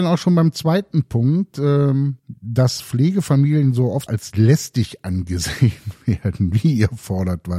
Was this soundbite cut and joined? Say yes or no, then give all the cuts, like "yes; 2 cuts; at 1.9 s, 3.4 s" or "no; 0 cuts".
yes; 2 cuts; at 2.2 s, 4.1 s